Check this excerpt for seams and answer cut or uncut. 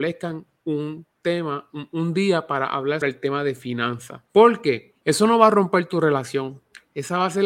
cut